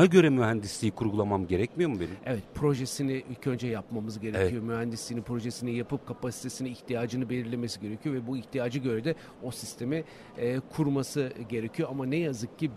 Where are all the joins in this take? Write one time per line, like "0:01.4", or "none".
none